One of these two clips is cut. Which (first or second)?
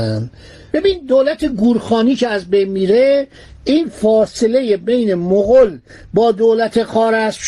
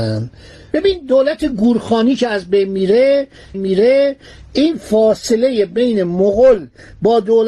second